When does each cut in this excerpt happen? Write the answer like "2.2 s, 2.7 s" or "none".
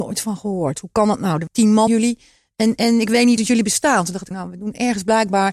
1.5 s, 1.9 s, 2.8 s, 3.4 s, 4.3 s